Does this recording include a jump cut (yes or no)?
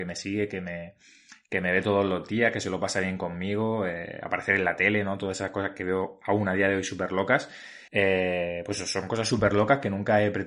yes